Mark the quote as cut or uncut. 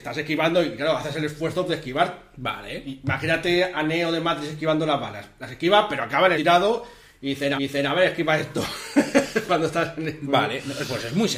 cut